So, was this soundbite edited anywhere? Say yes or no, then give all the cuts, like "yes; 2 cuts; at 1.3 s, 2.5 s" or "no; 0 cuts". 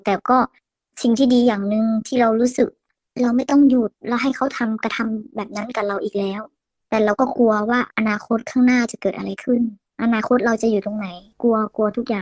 yes; 1 cut; at 7.9 s